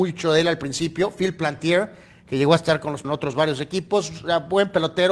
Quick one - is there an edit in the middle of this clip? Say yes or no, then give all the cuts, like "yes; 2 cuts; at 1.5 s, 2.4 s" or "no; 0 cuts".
yes; 1 cut; at 3.0 s